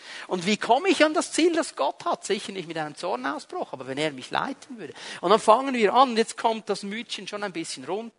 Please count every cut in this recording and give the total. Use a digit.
0